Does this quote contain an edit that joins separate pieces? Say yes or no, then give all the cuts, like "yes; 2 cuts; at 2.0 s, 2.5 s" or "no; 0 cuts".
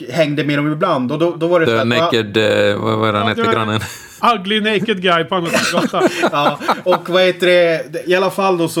no; 0 cuts